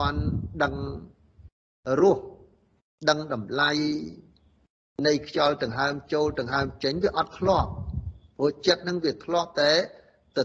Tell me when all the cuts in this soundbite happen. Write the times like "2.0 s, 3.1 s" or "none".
none